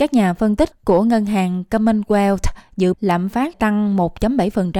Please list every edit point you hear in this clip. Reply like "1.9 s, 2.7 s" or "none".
2.9 s, 3.5 s